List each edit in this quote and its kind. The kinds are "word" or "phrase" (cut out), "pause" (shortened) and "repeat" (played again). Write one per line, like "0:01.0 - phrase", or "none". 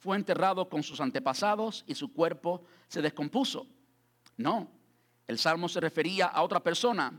none